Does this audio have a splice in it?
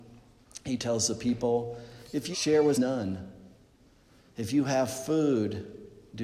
yes; 2 cuts; at 2.3 s, 2.7 s

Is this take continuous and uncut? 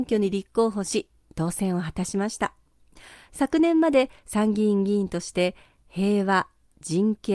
yes; 0 cuts

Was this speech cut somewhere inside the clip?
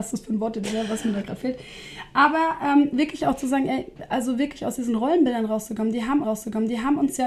yes; 1 cut; at 6.2 s

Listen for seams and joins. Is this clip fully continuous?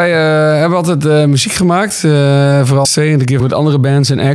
no; 2 cuts; at 2.8 s, 3.4 s

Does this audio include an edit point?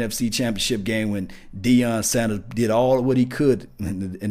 no; 0 cuts

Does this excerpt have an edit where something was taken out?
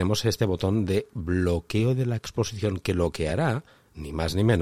no; 0 cuts

